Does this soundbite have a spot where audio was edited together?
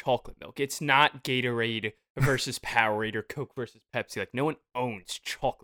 no; 0 cuts

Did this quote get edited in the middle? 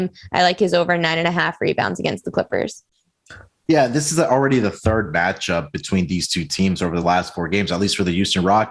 no; 0 cuts

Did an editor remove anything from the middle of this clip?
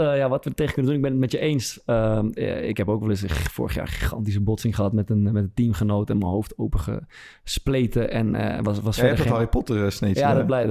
no; 0 cuts

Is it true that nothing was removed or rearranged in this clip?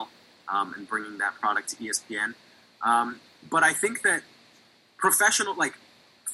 yes; 0 cuts

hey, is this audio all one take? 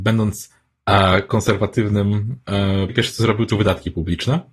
no; 2 cuts; at 2.9 s, 3.5 s

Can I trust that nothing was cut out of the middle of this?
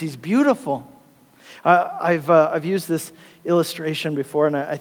yes; 0 cuts

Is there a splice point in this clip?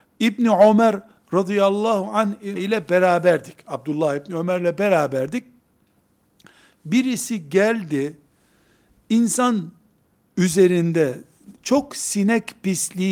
yes; 2 cuts; at 2.6 s, 11.5 s

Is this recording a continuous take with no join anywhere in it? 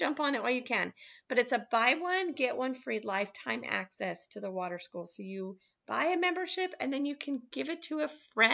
yes; 0 cuts

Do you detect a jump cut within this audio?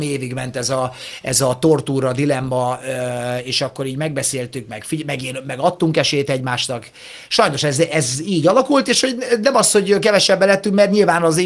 no; 0 cuts

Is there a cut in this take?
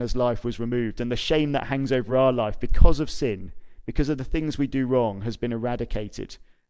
no; 0 cuts

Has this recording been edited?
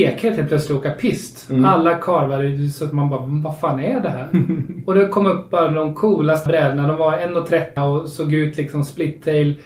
yes; 2 cuts; at 6.5 s, 7.8 s

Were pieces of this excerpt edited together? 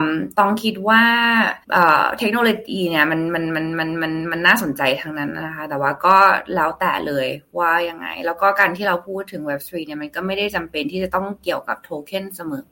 yes; 1 cut; at 1.6 s

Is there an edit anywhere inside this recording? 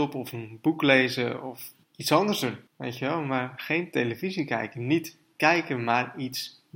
yes; 2 cuts; at 1.8 s, 2.7 s

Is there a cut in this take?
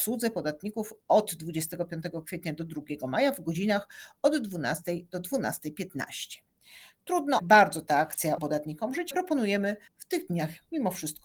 yes; 4 cuts; at 7.4 s, 8.4 s, 9.1 s, 9.9 s

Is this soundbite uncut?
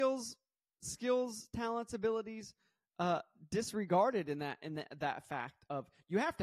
yes; 0 cuts

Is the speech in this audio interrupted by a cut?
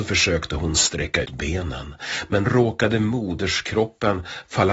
yes; 2 cuts; at 1.2 s, 2.5 s

